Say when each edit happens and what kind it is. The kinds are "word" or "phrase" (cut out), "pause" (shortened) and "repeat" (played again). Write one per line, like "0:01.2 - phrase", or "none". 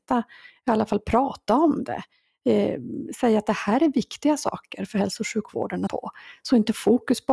0:05.9 - phrase